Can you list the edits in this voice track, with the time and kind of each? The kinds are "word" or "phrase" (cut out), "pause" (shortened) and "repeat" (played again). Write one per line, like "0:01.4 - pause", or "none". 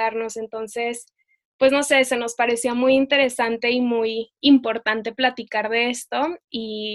none